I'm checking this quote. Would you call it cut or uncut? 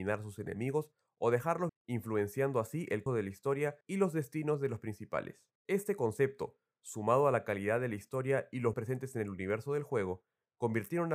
cut